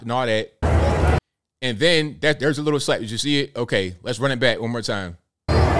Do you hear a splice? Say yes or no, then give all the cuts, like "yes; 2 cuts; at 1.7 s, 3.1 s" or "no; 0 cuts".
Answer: no; 0 cuts